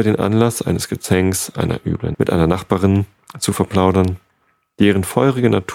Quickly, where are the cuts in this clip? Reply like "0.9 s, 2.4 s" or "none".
2.1 s